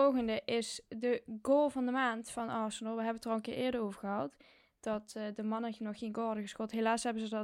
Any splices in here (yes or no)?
no